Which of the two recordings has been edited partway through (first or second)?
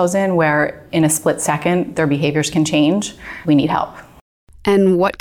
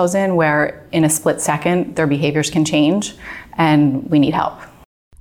first